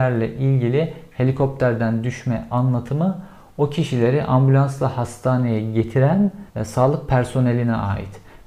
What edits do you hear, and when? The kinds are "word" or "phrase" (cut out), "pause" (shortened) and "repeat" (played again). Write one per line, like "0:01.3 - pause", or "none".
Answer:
0:06.5 - pause